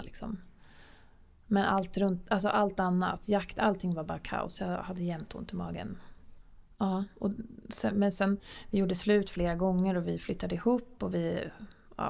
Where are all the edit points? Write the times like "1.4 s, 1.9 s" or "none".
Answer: none